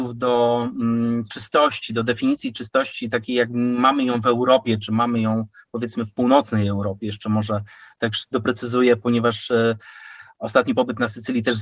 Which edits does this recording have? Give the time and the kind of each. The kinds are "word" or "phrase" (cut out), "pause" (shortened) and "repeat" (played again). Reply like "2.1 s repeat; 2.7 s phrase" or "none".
none

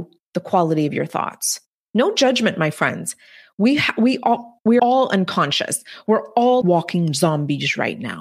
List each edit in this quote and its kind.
4.8 s word; 6.6 s word

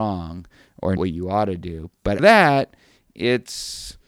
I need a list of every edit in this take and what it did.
1.0 s word; 2.2 s word

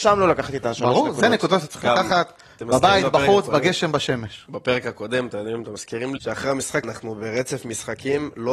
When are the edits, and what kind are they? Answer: 6.2 s word; 6.8 s word

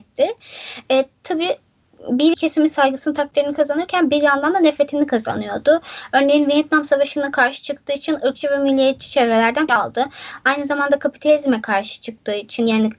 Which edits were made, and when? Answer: 2.3 s phrase; 9.7 s word

